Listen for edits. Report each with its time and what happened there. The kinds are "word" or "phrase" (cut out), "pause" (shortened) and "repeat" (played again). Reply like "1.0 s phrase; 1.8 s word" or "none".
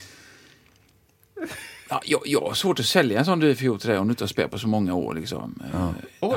none